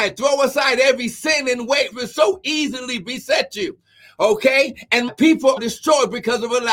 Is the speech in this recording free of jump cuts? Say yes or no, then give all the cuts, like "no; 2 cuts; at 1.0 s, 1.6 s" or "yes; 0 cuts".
no; 3 cuts; at 1.9 s, 5.1 s, 5.6 s